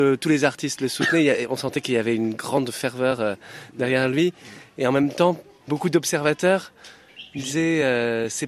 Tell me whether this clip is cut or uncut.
uncut